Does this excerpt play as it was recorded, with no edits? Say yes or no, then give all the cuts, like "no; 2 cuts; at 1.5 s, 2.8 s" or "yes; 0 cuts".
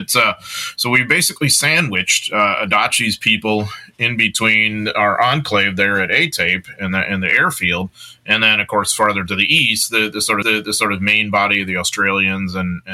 no; 1 cut; at 10.4 s